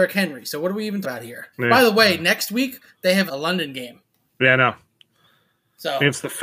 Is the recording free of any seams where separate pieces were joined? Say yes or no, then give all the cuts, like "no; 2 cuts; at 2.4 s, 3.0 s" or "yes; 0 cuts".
no; 3 cuts; at 1.0 s, 1.5 s, 3.3 s